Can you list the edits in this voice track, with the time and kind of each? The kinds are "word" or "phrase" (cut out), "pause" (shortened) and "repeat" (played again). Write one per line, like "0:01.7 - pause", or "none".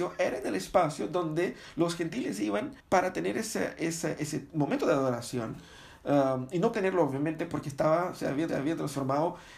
0:02.8 - pause
0:06.7 - word
0:08.5 - repeat